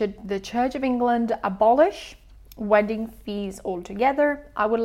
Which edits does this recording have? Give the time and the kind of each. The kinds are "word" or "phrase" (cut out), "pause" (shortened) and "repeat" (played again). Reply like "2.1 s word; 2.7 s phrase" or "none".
none